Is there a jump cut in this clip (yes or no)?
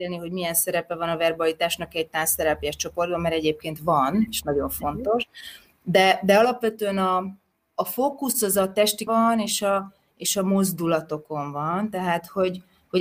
yes